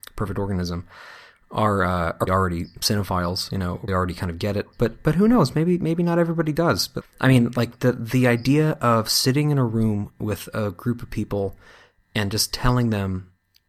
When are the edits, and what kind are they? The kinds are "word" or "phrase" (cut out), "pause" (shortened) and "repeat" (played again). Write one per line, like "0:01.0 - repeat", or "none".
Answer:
0:02.3 - word
0:03.9 - word
0:07.0 - word